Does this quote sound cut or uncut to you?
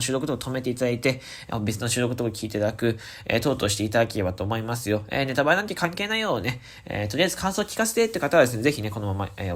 uncut